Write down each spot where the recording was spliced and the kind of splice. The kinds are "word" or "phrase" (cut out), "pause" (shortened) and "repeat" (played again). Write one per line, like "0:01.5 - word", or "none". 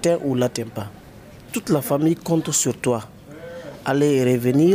none